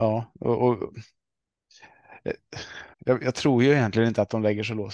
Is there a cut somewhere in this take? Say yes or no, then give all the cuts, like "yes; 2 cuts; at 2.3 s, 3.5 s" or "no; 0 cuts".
yes; 1 cut; at 2.9 s